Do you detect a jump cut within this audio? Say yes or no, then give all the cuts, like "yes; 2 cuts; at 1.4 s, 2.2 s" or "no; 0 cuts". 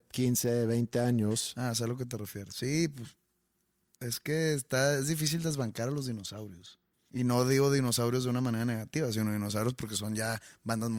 no; 0 cuts